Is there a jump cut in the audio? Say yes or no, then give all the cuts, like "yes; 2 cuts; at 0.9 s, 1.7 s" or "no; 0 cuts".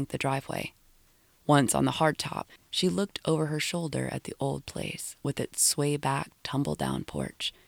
no; 0 cuts